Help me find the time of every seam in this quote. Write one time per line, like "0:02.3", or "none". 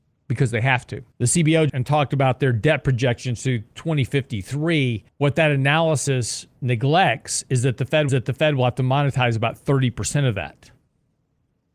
0:01.1
0:01.7
0:05.1
0:08.1